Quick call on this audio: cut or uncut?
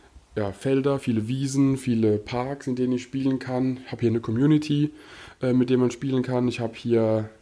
uncut